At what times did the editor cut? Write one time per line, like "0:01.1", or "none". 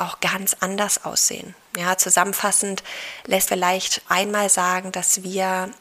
0:03.5
0:04.1